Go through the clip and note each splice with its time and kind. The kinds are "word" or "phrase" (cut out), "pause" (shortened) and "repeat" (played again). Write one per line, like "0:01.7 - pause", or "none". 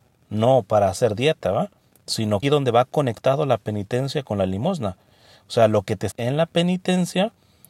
0:02.4 - phrase
0:06.1 - word